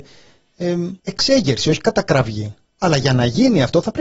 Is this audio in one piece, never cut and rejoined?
no; 2 cuts; at 1.0 s, 2.6 s

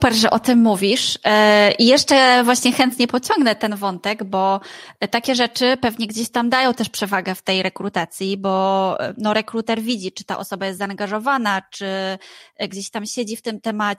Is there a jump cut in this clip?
no; 0 cuts

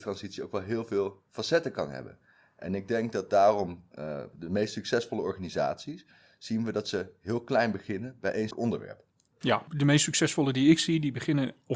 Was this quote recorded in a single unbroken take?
no; 1 cut; at 8.5 s

